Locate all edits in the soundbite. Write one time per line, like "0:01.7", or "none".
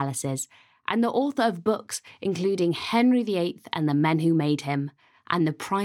none